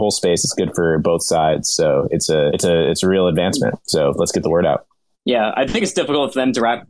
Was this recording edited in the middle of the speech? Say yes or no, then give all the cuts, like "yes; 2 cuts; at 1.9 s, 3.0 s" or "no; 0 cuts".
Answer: no; 0 cuts